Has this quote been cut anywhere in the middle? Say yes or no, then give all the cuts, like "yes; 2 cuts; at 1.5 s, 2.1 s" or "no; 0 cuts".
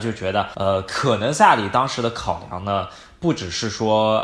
no; 0 cuts